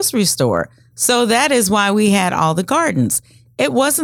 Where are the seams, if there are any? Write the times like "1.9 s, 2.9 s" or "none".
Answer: none

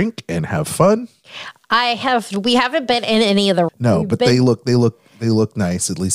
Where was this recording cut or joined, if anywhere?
3.7 s

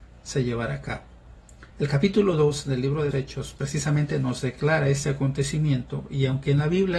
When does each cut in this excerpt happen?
1.7 s, 3.1 s, 3.6 s

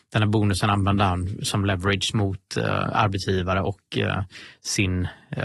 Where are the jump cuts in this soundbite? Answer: none

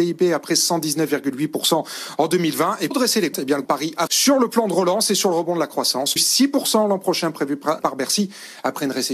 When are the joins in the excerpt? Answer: 2.9 s, 3.3 s, 3.6 s, 4.1 s, 6.2 s, 7.8 s

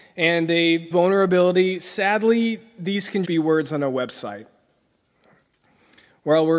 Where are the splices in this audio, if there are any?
0.9 s, 3.2 s

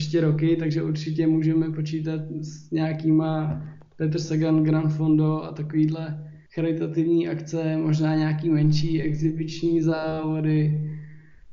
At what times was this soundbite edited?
6.5 s

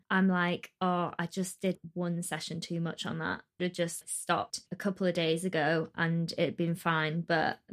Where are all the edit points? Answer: 3.6 s

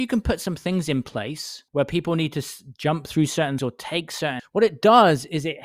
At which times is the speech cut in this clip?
1.7 s, 3.6 s, 4.4 s

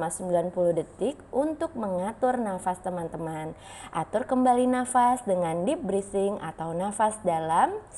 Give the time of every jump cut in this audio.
none

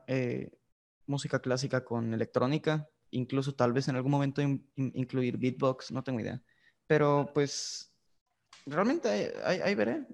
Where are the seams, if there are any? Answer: 3.1 s, 4.9 s, 6.6 s

